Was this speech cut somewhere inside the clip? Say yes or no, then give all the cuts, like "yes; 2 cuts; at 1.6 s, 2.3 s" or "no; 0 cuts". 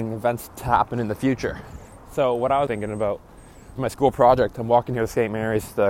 yes; 2 cuts; at 2.7 s, 3.8 s